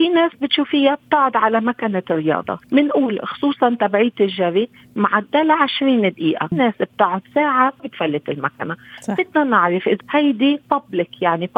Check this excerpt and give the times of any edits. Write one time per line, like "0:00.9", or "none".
0:02.6
0:06.5
0:07.8
0:10.0